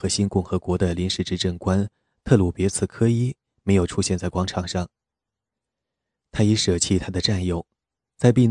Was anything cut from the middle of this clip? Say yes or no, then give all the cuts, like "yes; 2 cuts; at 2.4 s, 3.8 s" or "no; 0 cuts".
no; 0 cuts